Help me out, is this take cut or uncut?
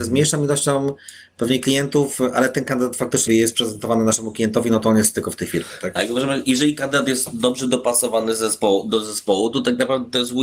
cut